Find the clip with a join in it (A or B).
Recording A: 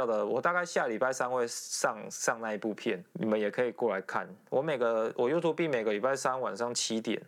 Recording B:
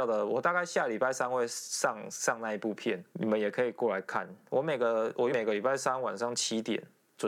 B